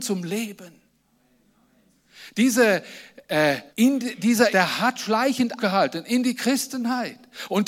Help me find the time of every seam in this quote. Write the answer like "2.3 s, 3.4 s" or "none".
3.7 s, 4.5 s, 5.6 s